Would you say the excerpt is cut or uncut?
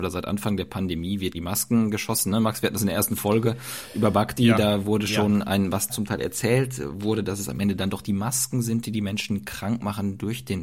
cut